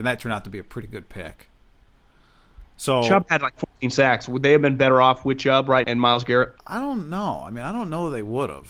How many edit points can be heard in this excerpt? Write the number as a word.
two